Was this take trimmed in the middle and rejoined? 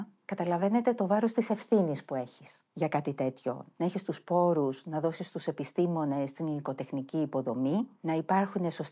no; 0 cuts

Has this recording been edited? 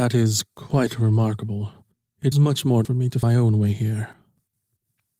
yes; 3 cuts; at 2.3 s, 2.8 s, 3.2 s

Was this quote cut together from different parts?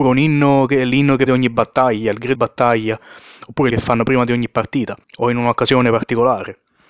yes; 4 cuts; at 1.3 s, 2.3 s, 3.7 s, 5.0 s

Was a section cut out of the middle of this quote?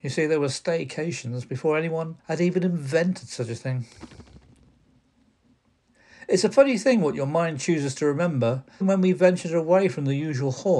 yes; 2 cuts; at 2.2 s, 8.8 s

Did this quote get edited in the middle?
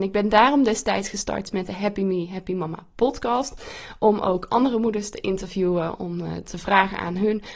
no; 0 cuts

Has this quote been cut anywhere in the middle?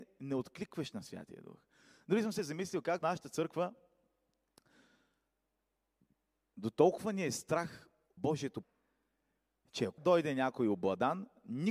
yes; 4 cuts; at 3.0 s, 8.2 s, 8.6 s, 10.0 s

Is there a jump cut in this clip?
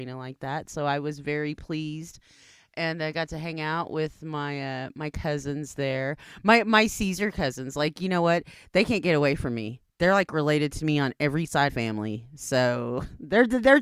yes; 1 cut; at 11.7 s

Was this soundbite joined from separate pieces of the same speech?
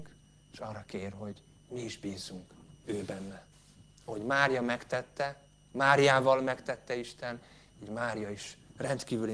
no; 0 cuts

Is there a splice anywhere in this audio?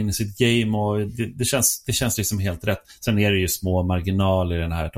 no; 0 cuts

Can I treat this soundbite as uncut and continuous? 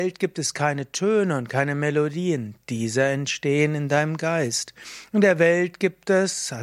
yes; 0 cuts

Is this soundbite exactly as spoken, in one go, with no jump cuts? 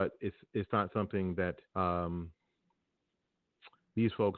no; 1 cut; at 1.7 s

